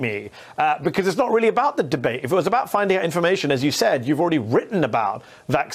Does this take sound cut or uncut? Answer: uncut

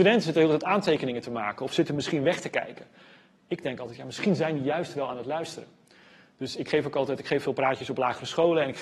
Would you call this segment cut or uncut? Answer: uncut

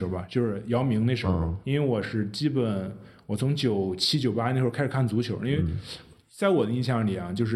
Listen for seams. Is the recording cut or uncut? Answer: cut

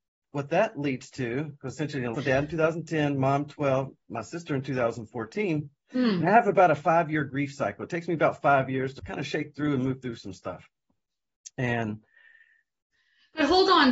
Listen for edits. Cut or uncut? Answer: cut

